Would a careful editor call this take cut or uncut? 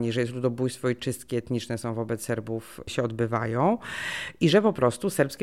uncut